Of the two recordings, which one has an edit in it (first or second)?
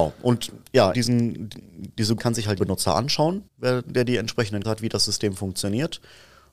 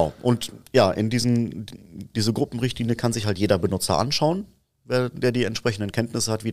first